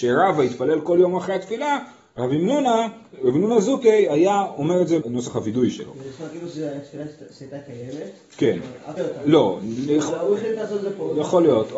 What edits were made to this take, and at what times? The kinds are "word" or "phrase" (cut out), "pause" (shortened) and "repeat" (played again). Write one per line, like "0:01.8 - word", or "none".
0:05.0 - phrase
0:09.0 - phrase